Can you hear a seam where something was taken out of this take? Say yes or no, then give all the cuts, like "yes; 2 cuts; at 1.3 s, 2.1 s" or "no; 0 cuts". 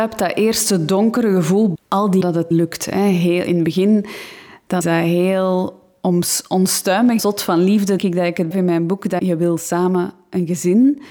yes; 9 cuts; at 1.7 s, 2.2 s, 2.5 s, 3.5 s, 4.8 s, 7.2 s, 8.0 s, 8.5 s, 9.2 s